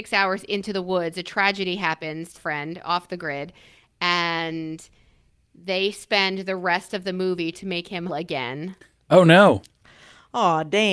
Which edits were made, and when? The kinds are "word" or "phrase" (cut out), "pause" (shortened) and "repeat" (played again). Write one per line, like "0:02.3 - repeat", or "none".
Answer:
0:02.4 - word
0:07.5 - word
0:08.1 - word